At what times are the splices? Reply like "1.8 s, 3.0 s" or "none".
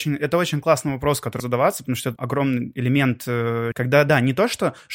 1.4 s, 2.2 s, 3.7 s